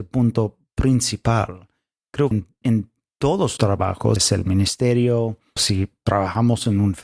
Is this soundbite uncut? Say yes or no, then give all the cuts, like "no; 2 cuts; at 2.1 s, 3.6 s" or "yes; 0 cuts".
no; 5 cuts; at 2.3 s, 2.6 s, 3.6 s, 4.2 s, 5.6 s